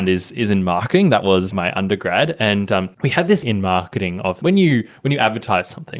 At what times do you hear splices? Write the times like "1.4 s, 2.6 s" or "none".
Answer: 1.5 s, 2.9 s, 3.4 s, 4.4 s